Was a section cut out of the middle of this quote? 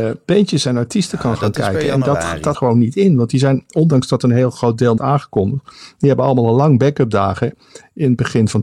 yes; 2 cuts; at 2.5 s, 5.0 s

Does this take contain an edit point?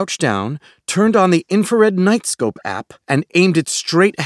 yes; 1 cut; at 3.0 s

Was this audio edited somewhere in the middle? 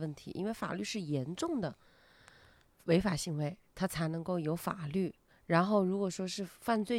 yes; 1 cut; at 5.3 s

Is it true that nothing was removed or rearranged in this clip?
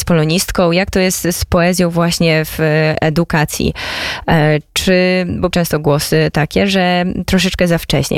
no; 1 cut; at 5.5 s

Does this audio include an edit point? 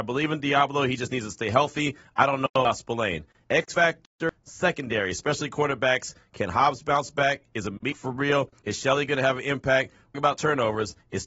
yes; 1 cut; at 10.1 s

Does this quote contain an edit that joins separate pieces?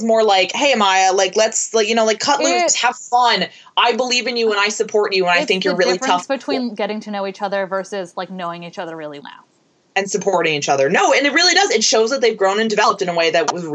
yes; 1 cut; at 9.2 s

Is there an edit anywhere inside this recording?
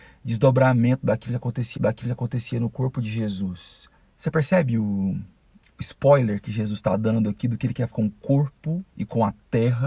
yes; 4 cuts; at 1.8 s, 4.0 s, 7.9 s, 8.9 s

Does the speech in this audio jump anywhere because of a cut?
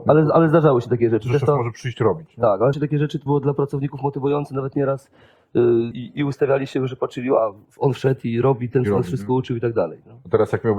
yes; 4 cuts; at 2.7 s, 3.3 s, 5.9 s, 7.6 s

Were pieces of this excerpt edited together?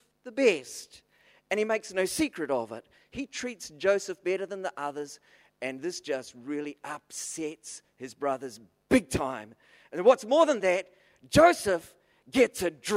no; 0 cuts

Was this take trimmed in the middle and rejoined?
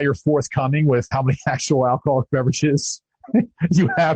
yes; 1 cut; at 1.1 s

